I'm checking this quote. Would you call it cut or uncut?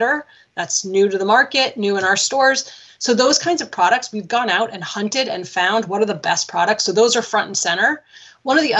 uncut